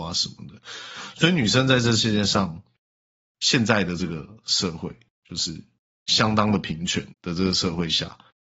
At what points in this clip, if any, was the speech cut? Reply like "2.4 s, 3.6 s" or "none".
7.1 s